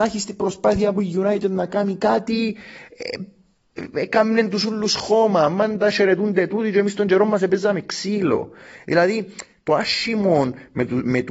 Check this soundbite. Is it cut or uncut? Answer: uncut